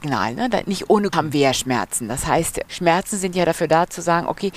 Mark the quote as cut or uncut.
cut